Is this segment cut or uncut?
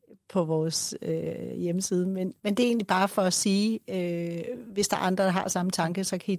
uncut